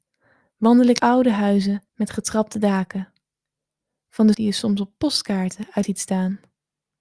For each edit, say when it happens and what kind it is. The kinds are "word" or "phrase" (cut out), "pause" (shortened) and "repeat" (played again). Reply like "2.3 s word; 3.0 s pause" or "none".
1.0 s word; 1.9 s pause; 4.3 s word; 5.8 s word